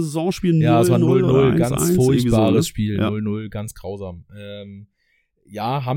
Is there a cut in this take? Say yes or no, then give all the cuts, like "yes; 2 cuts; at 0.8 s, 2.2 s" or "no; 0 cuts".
no; 0 cuts